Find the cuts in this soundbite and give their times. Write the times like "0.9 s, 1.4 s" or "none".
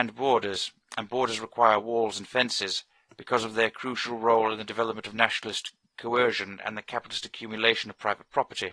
none